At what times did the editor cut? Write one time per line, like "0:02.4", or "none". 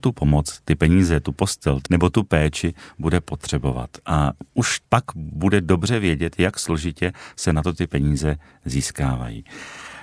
0:01.9
0:04.8